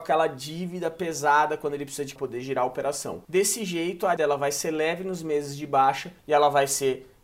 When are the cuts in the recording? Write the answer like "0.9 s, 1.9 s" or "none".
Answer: 2.2 s, 3.2 s, 4.2 s, 6.2 s

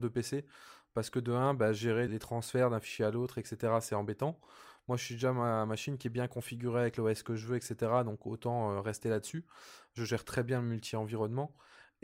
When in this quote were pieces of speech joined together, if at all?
2.1 s

